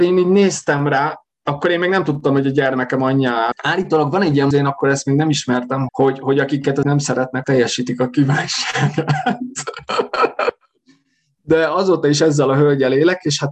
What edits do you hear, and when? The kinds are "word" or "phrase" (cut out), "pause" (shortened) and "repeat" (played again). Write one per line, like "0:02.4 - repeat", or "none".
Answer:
0:03.5 - word
0:04.5 - word
0:05.9 - word
0:06.8 - word
0:07.4 - word